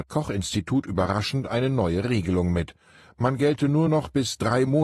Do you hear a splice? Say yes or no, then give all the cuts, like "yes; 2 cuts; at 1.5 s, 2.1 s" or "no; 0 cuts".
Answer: no; 0 cuts